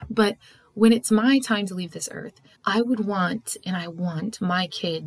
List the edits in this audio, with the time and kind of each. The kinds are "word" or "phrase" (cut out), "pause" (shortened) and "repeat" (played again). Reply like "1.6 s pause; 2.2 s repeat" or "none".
2.6 s pause